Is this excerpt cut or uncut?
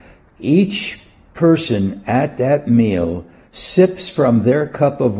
uncut